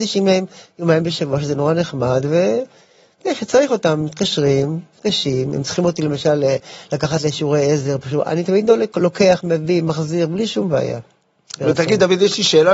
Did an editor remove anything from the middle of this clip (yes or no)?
no